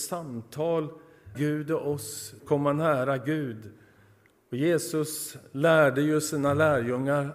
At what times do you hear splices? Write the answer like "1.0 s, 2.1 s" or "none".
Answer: 1.3 s, 2.4 s